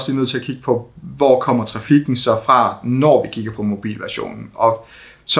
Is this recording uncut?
yes; 0 cuts

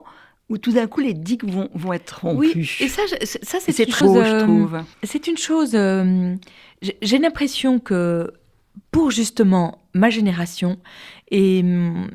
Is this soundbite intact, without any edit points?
no; 4 cuts; at 1.7 s, 4.0 s, 4.9 s, 8.8 s

